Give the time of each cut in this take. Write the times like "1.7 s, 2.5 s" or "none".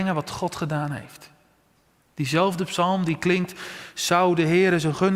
none